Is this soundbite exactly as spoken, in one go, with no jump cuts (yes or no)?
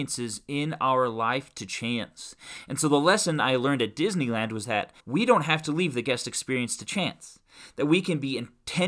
no